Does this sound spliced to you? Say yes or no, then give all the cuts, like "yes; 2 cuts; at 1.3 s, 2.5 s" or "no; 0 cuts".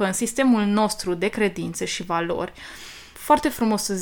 no; 0 cuts